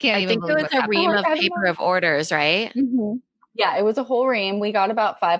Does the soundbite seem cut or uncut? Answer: uncut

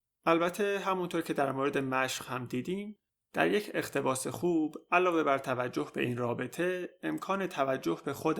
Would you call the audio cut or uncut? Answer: uncut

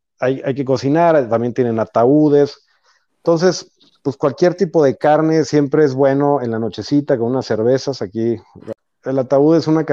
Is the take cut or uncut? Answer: uncut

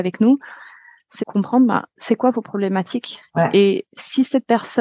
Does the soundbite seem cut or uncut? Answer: cut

